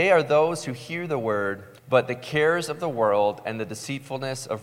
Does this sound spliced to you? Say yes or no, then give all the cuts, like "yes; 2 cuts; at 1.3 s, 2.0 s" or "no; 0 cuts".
yes; 1 cut; at 1.8 s